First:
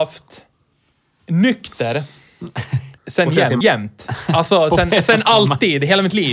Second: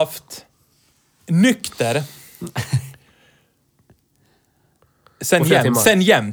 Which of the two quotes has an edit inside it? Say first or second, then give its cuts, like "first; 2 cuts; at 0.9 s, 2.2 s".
first; 2 cuts; at 3.0 s, 3.6 s